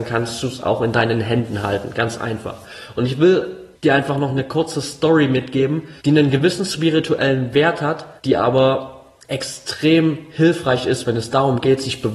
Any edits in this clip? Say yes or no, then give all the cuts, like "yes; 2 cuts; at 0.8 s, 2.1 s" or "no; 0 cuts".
yes; 4 cuts; at 3.7 s, 6.0 s, 8.2 s, 9.2 s